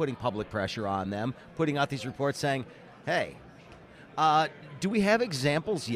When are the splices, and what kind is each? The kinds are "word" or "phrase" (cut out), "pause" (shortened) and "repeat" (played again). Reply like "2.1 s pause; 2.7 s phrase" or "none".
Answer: none

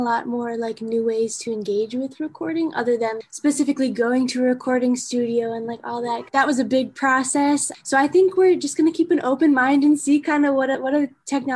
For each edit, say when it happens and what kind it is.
none

